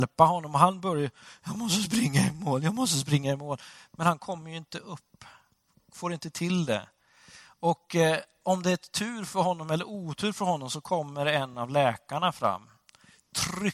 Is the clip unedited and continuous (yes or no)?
yes